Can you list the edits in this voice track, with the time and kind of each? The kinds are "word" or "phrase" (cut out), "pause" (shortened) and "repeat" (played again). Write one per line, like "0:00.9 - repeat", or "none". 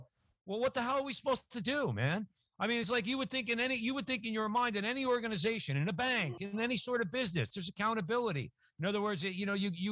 none

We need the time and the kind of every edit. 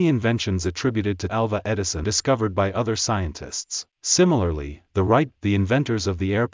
0:01.3 - word
0:02.0 - word
0:03.9 - pause
0:05.3 - word

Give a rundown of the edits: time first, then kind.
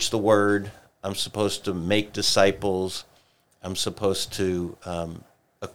none

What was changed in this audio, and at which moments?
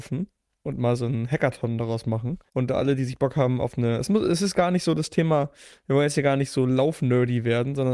0:02.5 - pause

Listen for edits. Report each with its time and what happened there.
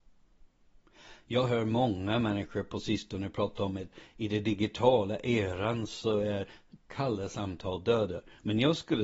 none

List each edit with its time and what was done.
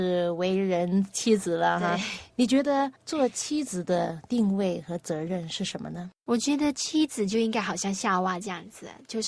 0:03.0 - pause
0:06.2 - pause

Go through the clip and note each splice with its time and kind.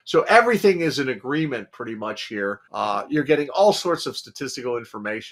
0:02.6 - pause

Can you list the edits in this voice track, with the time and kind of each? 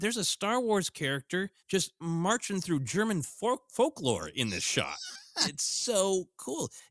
0:01.6 - pause

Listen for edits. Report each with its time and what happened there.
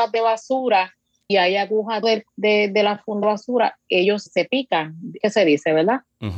0:01.3 - word
0:02.0 - word
0:03.2 - word
0:04.3 - word
0:05.2 - word

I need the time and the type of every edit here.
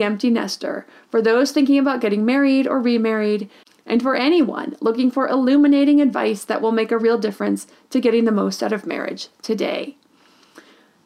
none

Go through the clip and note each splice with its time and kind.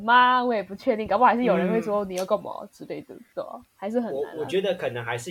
none

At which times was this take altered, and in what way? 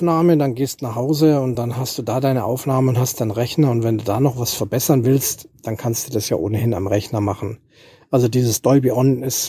none

